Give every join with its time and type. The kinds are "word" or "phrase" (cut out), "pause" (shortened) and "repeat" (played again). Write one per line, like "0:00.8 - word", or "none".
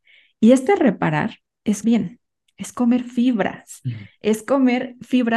0:01.8 - word